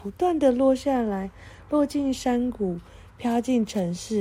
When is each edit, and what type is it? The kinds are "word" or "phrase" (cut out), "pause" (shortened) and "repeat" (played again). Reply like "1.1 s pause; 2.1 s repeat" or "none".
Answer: none